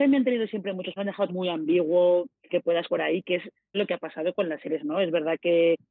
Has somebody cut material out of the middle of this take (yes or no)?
yes